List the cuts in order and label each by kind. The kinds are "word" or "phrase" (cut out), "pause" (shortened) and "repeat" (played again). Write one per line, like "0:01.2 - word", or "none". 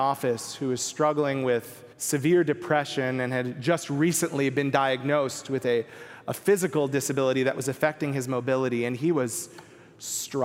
0:01.9 - pause